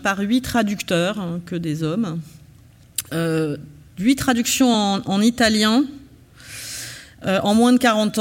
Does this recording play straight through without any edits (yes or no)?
yes